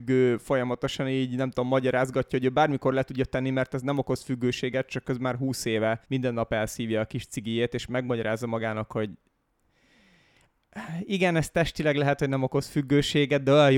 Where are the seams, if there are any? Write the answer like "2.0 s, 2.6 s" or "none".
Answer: 6.0 s